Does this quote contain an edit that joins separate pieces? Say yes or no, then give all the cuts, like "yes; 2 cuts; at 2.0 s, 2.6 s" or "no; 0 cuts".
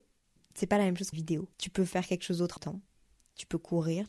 yes; 3 cuts; at 1.1 s, 1.5 s, 2.6 s